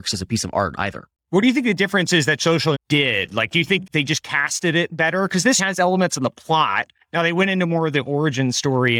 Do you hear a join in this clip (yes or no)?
yes